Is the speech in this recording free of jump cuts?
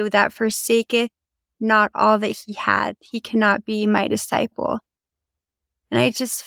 yes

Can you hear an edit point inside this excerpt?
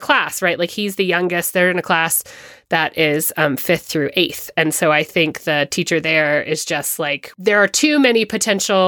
no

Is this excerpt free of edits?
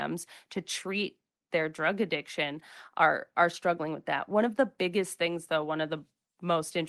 yes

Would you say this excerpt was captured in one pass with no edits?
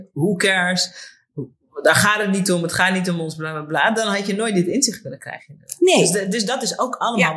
yes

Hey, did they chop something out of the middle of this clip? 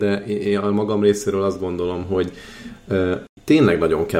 no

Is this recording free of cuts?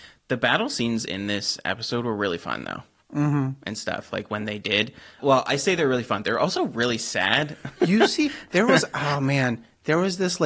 yes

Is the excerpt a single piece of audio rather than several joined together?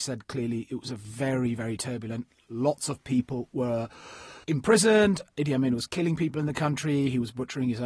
no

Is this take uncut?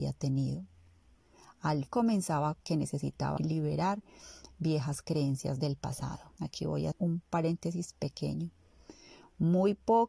no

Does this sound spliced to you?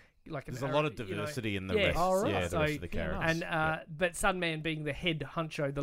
no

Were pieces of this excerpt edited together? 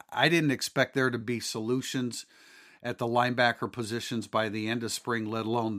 no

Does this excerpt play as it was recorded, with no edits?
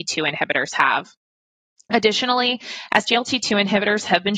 yes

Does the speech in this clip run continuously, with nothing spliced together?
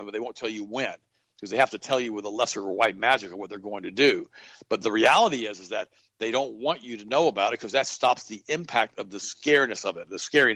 yes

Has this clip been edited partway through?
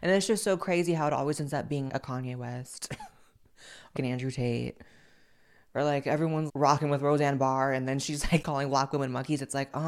yes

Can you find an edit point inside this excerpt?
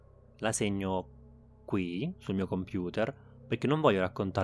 no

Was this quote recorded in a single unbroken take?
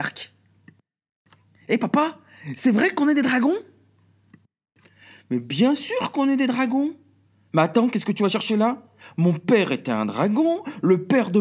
yes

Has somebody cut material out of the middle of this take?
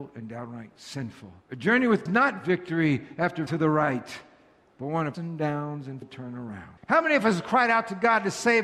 yes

